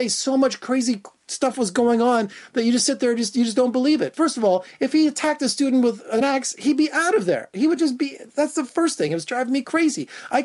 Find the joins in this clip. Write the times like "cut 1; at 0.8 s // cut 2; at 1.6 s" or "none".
none